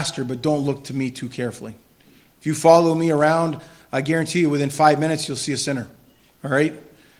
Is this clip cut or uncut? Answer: uncut